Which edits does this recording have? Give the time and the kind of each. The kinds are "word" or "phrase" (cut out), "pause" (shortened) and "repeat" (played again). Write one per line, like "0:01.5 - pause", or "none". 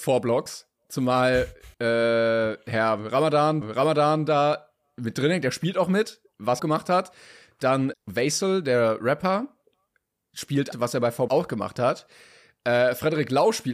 0:01.7 - pause
0:03.6 - repeat
0:06.6 - phrase
0:07.9 - word
0:10.7 - phrase
0:11.3 - word